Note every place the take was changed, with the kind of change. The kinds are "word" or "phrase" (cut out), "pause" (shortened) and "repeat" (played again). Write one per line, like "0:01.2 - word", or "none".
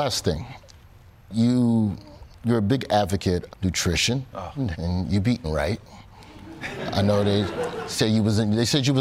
0:03.5 - word
0:04.7 - word
0:05.4 - word